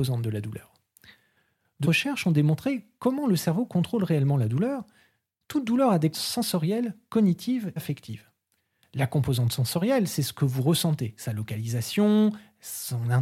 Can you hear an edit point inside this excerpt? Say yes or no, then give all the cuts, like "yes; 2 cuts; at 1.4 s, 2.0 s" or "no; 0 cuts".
yes; 3 cuts; at 1.8 s, 6.1 s, 7.8 s